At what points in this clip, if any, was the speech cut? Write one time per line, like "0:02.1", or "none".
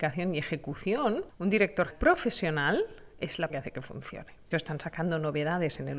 0:01.9
0:03.5
0:04.5